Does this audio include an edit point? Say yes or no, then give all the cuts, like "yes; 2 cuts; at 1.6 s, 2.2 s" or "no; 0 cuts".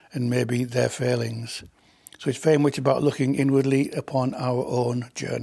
no; 0 cuts